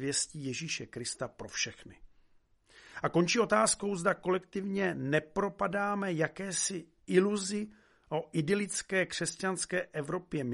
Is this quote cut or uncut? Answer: uncut